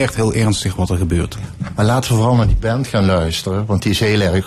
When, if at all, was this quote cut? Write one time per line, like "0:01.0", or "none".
none